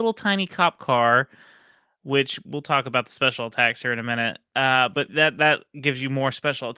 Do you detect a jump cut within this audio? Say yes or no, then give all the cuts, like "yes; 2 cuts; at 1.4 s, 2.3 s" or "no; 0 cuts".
no; 0 cuts